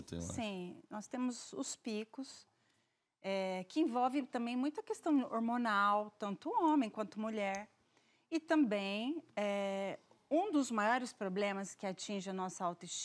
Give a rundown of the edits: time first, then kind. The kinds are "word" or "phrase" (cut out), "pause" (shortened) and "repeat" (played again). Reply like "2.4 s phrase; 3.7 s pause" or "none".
none